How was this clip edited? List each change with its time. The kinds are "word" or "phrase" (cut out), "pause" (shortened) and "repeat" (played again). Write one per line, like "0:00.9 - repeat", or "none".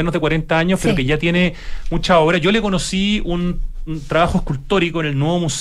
none